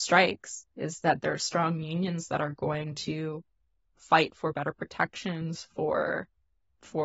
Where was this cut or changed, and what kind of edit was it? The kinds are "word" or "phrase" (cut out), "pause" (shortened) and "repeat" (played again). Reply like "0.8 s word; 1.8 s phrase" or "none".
none